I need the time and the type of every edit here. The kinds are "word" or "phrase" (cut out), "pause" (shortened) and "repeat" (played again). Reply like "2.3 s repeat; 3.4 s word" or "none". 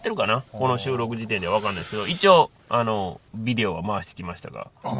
2.6 s pause; 3.3 s pause